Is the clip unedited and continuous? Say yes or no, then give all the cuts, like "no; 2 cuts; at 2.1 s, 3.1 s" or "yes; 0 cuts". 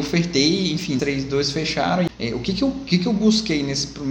no; 1 cut; at 1.0 s